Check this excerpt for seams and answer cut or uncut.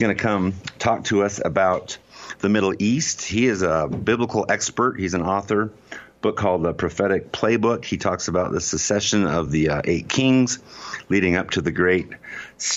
uncut